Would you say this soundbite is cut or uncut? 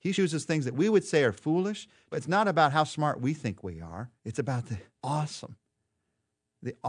cut